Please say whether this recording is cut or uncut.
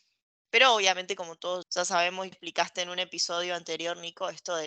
cut